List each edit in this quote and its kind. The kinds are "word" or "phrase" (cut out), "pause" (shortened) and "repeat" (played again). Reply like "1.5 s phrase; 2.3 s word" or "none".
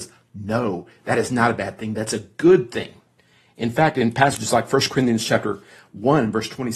none